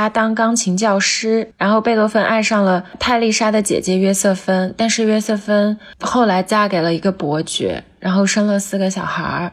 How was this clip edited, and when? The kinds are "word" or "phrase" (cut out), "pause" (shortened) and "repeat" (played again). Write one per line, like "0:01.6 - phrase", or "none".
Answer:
none